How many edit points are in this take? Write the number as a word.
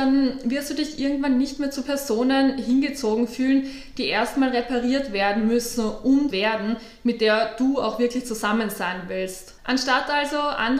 one